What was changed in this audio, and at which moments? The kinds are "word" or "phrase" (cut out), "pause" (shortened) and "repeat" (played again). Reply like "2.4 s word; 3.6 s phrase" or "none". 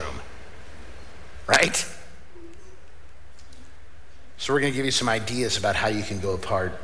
none